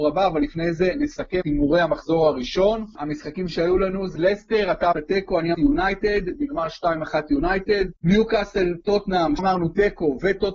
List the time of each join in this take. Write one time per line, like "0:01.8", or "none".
0:01.4
0:04.2
0:04.9
0:05.5
0:08.0
0:09.4